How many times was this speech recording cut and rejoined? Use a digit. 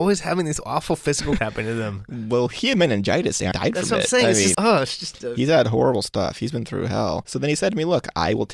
3